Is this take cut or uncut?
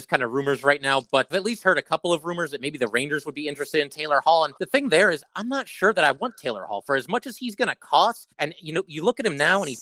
cut